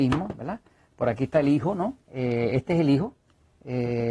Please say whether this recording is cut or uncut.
cut